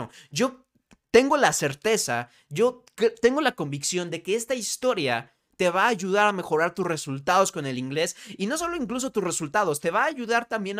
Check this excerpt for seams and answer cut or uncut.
uncut